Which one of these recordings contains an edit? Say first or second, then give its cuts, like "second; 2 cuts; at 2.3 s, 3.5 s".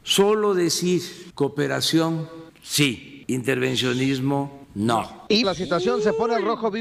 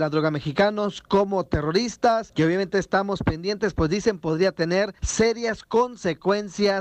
first; 1 cut; at 5.4 s